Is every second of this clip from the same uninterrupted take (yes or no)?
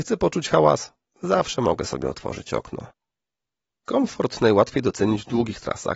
yes